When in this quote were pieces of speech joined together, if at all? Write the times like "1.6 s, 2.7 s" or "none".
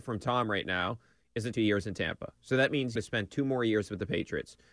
1.5 s, 3.0 s